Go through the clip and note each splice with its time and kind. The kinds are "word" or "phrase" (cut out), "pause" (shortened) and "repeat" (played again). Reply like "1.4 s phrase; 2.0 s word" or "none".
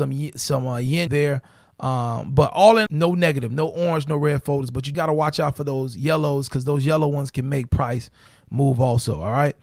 1.1 s word; 2.9 s word; 4.9 s word